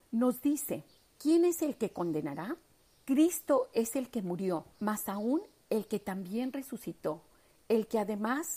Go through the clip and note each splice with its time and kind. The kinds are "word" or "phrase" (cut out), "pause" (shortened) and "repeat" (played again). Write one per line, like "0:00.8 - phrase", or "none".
0:01.0 - pause
0:02.8 - pause
0:04.7 - pause